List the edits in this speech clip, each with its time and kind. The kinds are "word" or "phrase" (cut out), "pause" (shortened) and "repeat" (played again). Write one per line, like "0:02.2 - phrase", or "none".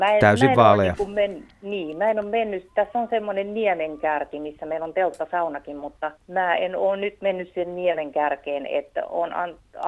0:06.2 - pause